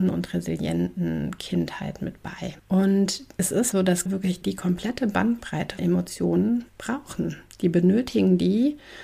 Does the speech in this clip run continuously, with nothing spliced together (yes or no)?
no